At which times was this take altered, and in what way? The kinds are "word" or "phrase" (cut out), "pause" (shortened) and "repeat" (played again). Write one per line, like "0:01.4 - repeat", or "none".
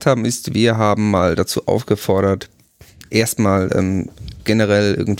none